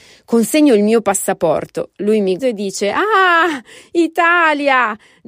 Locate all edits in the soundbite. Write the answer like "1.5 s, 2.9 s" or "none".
2.4 s